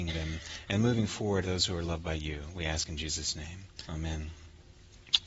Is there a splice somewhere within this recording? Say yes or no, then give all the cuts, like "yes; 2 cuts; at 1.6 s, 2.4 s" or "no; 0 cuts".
yes; 2 cuts; at 1.4 s, 3.8 s